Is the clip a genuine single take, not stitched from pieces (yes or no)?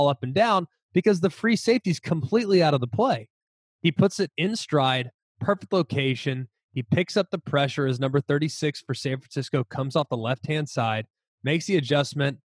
yes